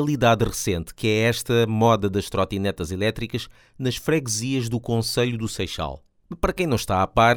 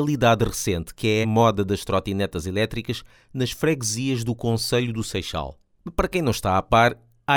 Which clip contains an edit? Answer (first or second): second